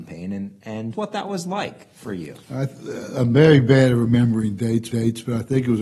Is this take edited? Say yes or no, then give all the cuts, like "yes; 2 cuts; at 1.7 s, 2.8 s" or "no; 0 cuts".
yes; 3 cuts; at 0.9 s, 2.4 s, 4.9 s